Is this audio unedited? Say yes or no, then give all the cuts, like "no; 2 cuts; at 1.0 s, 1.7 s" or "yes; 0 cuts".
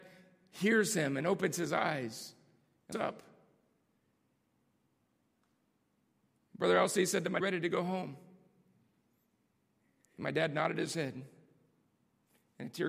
no; 2 cuts; at 2.9 s, 7.4 s